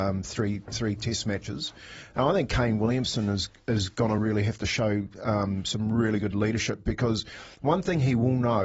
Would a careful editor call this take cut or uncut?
uncut